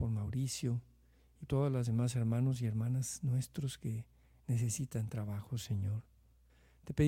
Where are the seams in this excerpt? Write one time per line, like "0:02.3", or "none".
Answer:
0:01.5